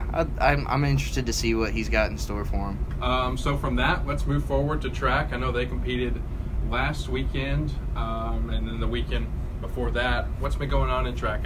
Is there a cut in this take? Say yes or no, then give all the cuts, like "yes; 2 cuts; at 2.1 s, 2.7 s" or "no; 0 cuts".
no; 0 cuts